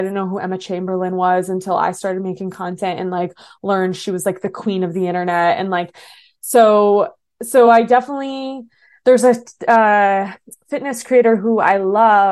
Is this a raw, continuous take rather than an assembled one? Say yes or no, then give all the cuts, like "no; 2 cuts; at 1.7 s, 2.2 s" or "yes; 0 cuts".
yes; 0 cuts